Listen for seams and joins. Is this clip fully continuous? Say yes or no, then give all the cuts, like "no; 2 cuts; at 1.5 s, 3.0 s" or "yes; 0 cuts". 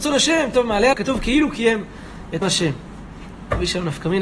no; 2 cuts; at 0.9 s, 2.4 s